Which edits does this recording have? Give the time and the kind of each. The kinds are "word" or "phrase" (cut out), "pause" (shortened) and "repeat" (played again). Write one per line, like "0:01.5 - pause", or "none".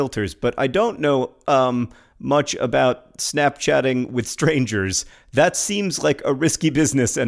none

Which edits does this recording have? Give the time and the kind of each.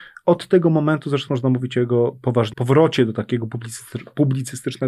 0:01.3 - word
0:02.5 - word

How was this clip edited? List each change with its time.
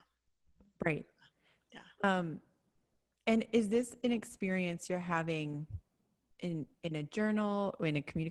none

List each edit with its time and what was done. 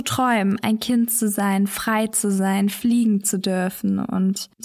none

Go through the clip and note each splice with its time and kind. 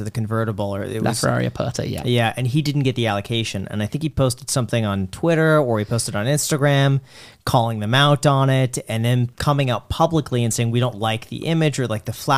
none

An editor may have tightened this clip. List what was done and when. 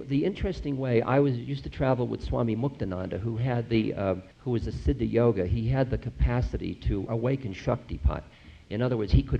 0:04.3 - pause
0:07.1 - word

